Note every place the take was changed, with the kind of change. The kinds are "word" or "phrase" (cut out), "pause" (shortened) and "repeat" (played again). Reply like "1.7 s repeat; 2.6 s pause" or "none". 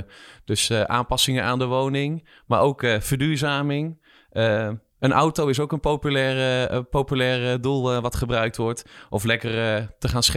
4.9 s pause